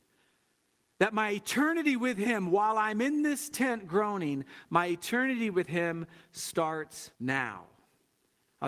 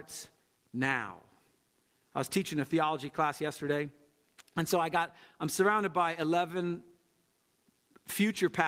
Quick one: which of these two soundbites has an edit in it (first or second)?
first